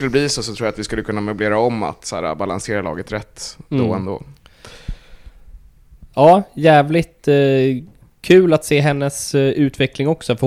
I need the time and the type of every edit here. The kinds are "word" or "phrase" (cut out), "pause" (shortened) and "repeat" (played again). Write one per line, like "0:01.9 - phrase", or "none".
none

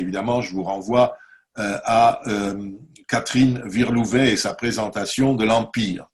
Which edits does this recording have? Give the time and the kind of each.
none

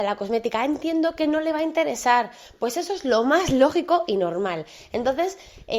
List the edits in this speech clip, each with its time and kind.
none

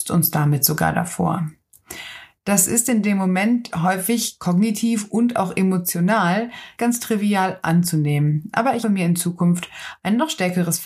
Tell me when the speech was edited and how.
0:06.8 - word
0:08.8 - word

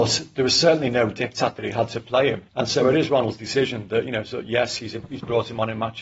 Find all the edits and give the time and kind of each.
0:02.5 - pause

